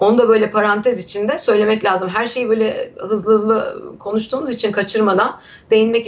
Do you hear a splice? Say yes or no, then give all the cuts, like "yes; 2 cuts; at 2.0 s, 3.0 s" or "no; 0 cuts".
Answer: no; 0 cuts